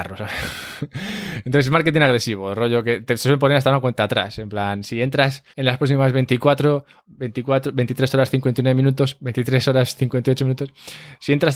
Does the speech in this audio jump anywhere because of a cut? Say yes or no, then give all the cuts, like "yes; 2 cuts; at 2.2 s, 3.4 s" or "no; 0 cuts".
yes; 2 cuts; at 5.5 s, 7.0 s